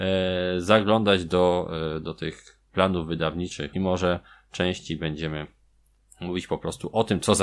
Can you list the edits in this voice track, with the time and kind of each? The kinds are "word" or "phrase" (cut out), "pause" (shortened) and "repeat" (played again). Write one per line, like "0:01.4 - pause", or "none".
0:03.7 - word